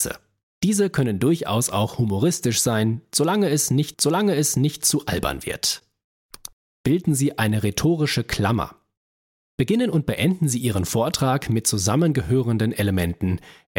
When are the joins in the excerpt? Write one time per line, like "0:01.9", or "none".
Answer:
0:03.9